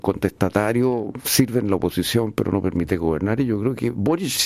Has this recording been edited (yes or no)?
no